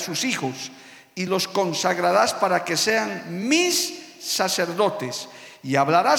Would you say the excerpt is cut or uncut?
uncut